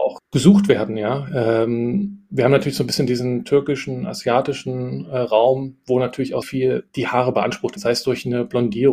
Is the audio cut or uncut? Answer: cut